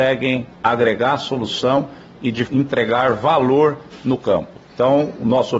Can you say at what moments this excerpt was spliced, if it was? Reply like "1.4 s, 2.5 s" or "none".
2.5 s, 4.6 s